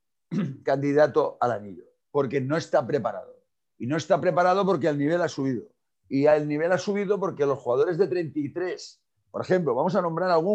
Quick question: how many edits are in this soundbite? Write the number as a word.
zero